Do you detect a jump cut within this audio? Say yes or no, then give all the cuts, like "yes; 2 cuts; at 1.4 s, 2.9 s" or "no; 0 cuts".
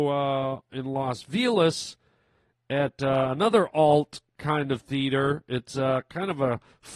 no; 0 cuts